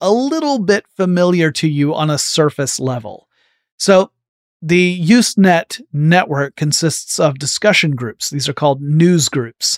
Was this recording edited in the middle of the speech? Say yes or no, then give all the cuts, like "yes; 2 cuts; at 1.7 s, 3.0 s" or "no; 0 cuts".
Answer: no; 0 cuts